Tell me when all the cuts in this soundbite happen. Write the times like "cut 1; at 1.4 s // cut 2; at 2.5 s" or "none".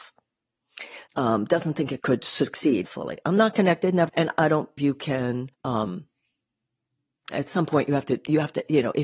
cut 1; at 1.1 s // cut 2; at 2.0 s // cut 3; at 2.8 s // cut 4; at 4.1 s // cut 5; at 4.8 s // cut 6; at 5.5 s